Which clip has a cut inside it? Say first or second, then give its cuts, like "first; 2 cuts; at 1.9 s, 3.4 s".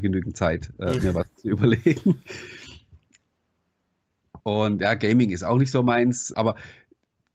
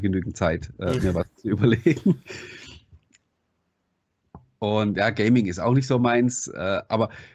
first; 2 cuts; at 4.4 s, 6.3 s